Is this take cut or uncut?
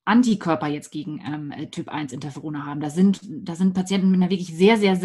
uncut